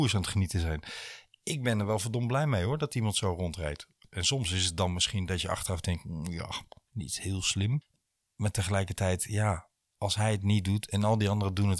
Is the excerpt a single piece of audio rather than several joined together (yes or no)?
yes